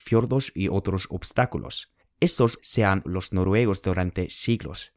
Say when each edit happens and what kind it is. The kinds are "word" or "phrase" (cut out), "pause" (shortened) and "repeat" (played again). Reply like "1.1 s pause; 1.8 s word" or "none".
2.6 s word; 3.0 s word